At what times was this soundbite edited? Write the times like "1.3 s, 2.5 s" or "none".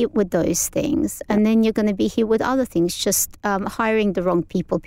none